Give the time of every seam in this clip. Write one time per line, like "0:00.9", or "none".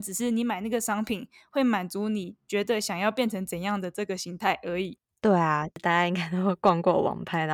none